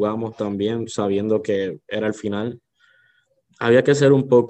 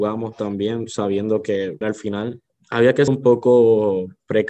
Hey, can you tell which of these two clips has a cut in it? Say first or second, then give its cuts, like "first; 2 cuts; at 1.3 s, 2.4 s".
second; 3 cuts; at 1.8 s, 2.5 s, 3.1 s